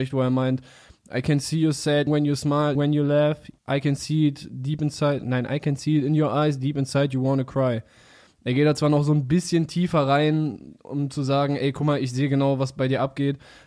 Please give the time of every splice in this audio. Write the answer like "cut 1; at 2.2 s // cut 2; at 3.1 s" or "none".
cut 1; at 2.1 s // cut 2; at 2.7 s // cut 3; at 3.6 s